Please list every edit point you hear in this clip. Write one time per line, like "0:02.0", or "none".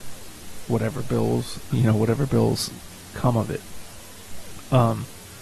0:01.7

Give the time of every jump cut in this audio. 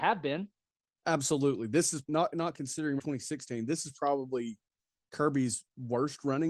0:02.0
0:03.0

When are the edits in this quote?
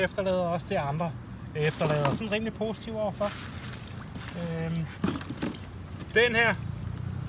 0:02.2

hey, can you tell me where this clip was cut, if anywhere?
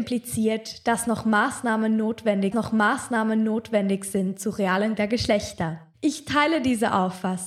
0:02.5
0:05.0
0:05.9

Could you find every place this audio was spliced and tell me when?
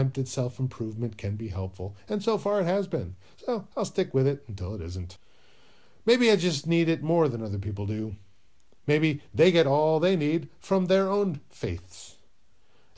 none

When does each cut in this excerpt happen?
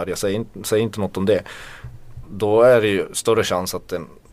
none

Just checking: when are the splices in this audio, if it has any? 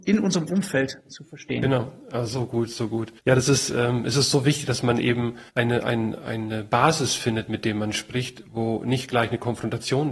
0:03.2
0:05.5

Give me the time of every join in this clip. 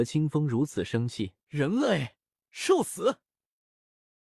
0:01.4

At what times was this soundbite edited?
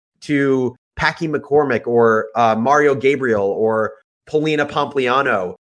none

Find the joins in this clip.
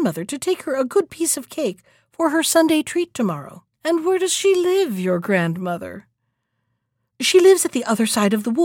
0:03.7

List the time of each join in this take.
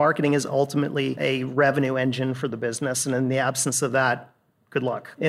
none

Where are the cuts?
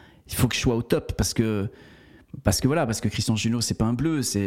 none

